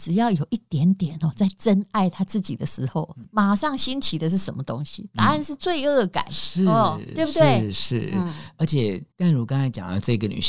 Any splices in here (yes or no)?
yes